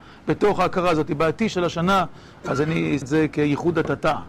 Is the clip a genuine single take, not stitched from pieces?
no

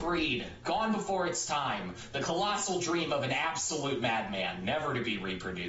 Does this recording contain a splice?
no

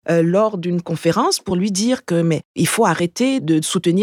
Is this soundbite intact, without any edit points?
yes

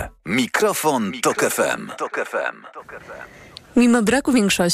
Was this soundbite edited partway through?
no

